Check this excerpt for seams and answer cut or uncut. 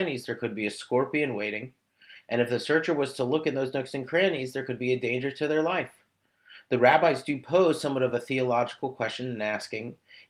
uncut